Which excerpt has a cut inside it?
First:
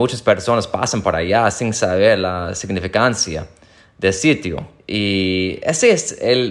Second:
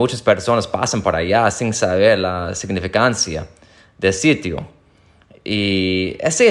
first; 1 cut; at 4.8 s

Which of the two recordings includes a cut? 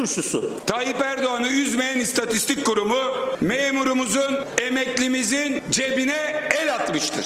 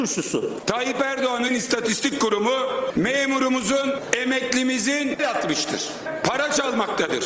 second; 2 cuts; at 1.5 s, 5.2 s

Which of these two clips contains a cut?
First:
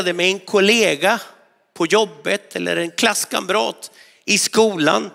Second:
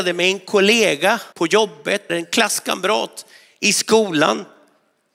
second; 2 cuts; at 1.3 s, 2.1 s

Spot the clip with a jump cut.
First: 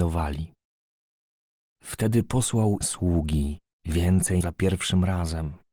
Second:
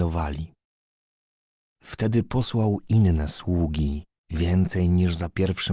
first; 2 cuts; at 2.8 s, 4.4 s

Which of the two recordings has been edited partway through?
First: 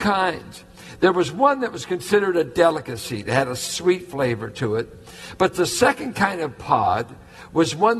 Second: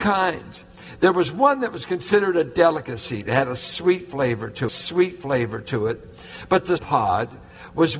second; 2 cuts; at 4.7 s, 6.8 s

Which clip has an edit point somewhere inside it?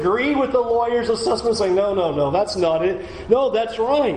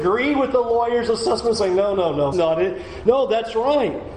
second; 1 cut; at 2.3 s

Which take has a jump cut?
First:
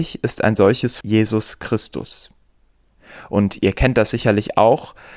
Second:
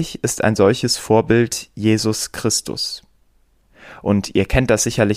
first; 1 cut; at 1.0 s

